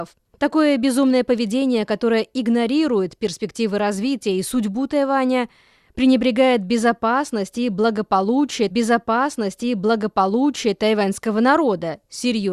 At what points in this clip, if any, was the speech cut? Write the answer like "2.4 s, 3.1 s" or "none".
8.7 s